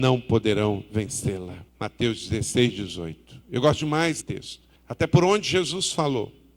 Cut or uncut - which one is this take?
cut